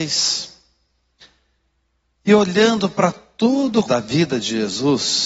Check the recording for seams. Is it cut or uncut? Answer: cut